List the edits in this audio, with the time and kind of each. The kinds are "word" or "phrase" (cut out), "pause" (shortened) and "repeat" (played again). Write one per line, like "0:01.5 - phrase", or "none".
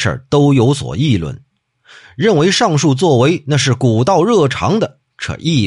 none

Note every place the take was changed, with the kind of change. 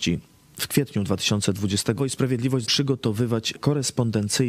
0:02.0 - phrase
0:02.6 - word
0:03.5 - word

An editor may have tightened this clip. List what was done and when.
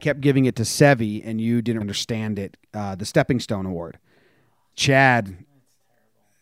0:01.8 - word
0:04.7 - word

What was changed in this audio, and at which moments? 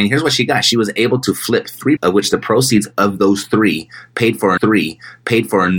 0:02.0 - word
0:04.6 - repeat

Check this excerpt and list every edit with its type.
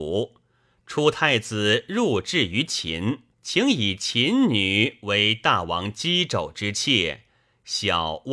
0:03.3 - pause

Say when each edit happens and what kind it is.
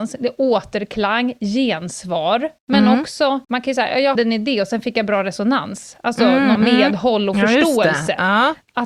0:02.6 - pause
0:03.4 - pause
0:04.1 - word
0:06.5 - word

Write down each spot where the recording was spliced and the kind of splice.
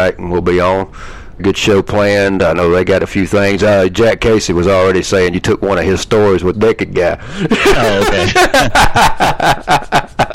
0:01.4 - phrase
0:06.5 - phrase

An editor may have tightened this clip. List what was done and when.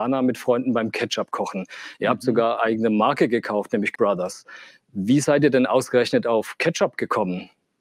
0:02.6 - word
0:03.9 - word

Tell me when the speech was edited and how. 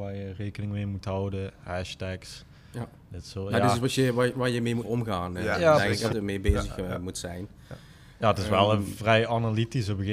0:04.8 - word
0:06.1 - phrase

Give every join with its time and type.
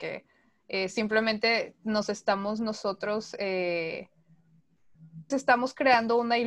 0:05.3 - word

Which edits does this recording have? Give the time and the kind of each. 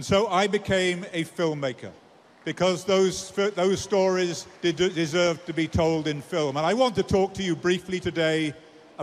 0:02.2 - pause
0:04.6 - pause

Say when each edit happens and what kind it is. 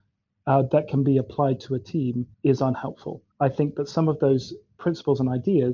0:02.3 - pause
0:03.3 - pause

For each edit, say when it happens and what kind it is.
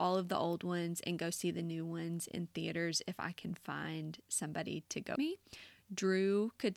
0:05.2 - word

